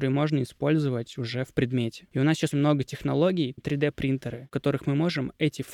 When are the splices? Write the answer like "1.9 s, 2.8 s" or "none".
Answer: 2.5 s, 3.6 s